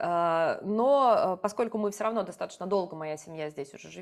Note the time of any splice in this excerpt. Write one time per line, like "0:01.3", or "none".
none